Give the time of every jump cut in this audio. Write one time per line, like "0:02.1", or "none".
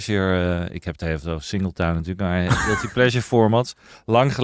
none